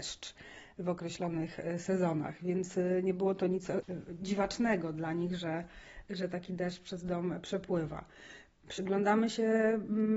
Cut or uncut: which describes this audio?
uncut